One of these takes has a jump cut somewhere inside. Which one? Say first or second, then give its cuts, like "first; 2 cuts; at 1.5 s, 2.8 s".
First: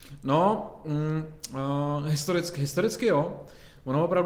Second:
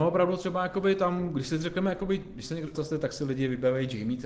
second; 1 cut; at 2.7 s